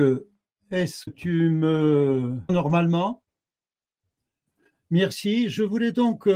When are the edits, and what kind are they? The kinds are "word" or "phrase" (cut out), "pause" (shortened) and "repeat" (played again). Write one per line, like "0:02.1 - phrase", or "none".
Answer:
0:01.1 - word
0:02.5 - word